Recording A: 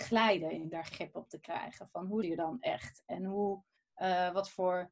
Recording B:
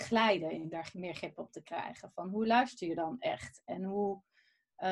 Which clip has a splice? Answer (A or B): A